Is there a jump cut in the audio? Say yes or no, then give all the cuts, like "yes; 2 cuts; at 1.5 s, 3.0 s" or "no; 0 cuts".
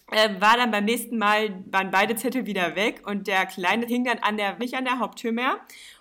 yes; 2 cuts; at 3.9 s, 4.6 s